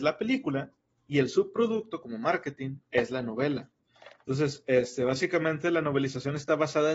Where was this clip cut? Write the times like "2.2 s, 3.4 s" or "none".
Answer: 2.8 s